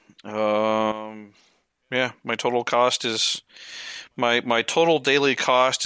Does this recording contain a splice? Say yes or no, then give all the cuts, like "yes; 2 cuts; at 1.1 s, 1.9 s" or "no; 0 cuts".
no; 0 cuts